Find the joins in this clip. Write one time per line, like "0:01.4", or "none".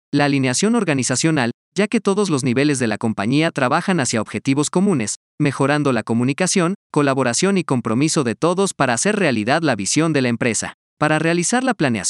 0:10.8